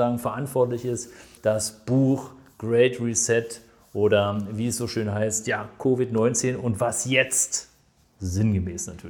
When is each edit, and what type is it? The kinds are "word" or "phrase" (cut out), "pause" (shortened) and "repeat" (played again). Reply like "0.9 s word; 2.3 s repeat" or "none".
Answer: 1.4 s word